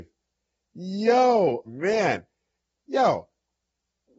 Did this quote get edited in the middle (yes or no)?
yes